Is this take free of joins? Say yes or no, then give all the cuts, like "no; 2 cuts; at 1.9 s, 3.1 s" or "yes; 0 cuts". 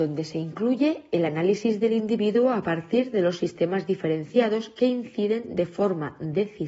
yes; 0 cuts